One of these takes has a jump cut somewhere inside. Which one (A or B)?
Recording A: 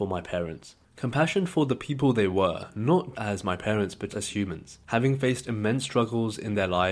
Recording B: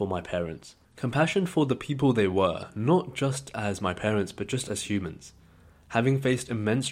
A